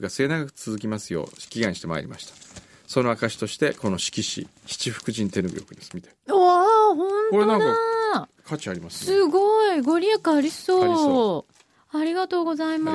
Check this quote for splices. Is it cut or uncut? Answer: cut